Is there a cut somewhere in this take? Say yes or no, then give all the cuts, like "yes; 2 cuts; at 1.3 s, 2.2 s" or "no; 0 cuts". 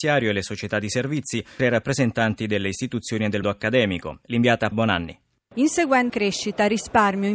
yes; 4 cuts; at 1.6 s, 3.4 s, 4.7 s, 6.1 s